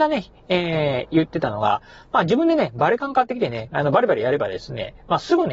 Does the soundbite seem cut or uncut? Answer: uncut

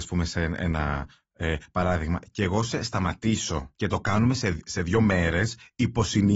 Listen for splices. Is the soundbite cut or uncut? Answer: uncut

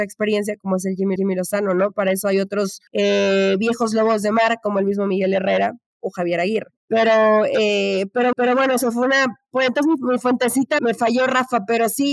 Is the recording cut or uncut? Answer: cut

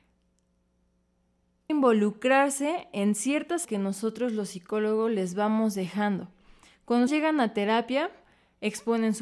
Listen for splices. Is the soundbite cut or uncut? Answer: cut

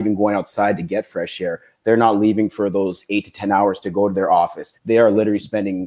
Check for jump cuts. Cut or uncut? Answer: cut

